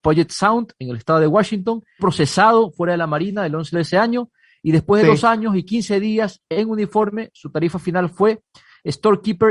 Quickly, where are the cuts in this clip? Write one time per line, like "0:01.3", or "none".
0:02.0
0:03.7